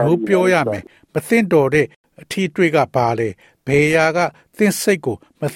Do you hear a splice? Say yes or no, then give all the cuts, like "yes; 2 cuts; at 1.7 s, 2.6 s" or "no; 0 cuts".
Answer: no; 0 cuts